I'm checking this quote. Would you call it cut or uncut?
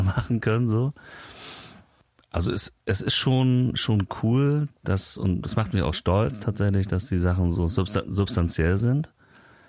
uncut